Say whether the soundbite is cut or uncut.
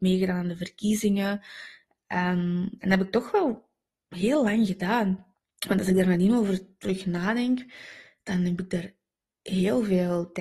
cut